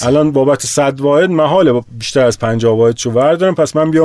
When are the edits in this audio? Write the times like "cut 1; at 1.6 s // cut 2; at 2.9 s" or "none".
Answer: none